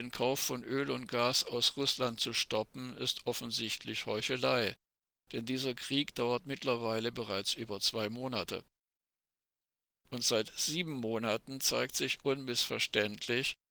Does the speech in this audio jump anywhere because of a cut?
no; 0 cuts

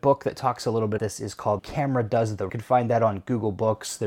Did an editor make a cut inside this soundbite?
yes; 3 cuts; at 1.0 s, 1.6 s, 2.5 s

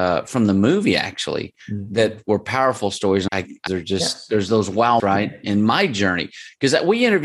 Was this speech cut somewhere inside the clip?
yes; 4 cuts; at 1.6 s, 3.3 s, 3.7 s, 5.0 s

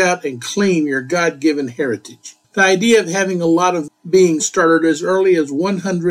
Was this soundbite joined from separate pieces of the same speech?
yes; 3 cuts; at 2.4 s, 3.9 s, 4.4 s

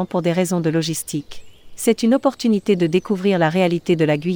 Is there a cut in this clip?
no; 0 cuts

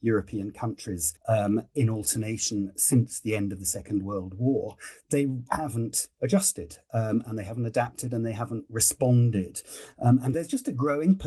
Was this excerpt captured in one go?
no; 3 cuts; at 1.2 s, 5.5 s, 10.3 s

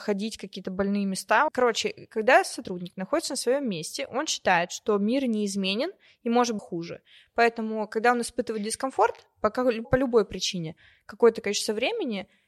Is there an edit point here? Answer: yes; 3 cuts; at 1.5 s, 6.6 s, 9.8 s

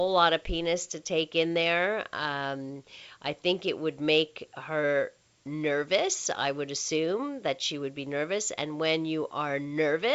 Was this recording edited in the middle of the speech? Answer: no; 0 cuts

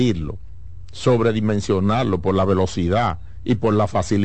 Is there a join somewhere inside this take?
no; 0 cuts

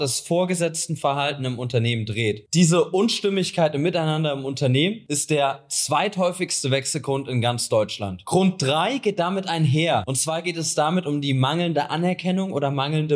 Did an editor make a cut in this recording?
no; 0 cuts

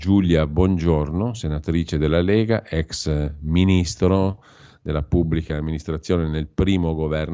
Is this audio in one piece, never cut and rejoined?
yes; 0 cuts

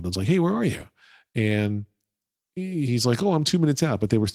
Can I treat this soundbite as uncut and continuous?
yes; 0 cuts

